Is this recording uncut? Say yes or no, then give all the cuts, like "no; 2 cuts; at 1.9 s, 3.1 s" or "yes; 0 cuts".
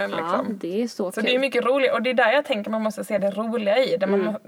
yes; 0 cuts